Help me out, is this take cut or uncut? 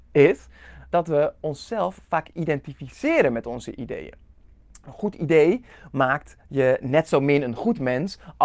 cut